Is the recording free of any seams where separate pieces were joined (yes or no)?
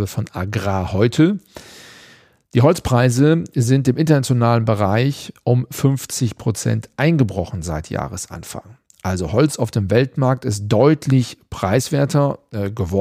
yes